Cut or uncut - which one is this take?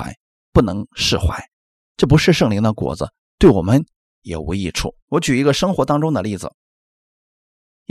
cut